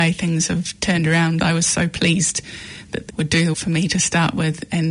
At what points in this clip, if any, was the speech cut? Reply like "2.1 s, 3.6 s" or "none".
1.4 s, 3.1 s, 3.5 s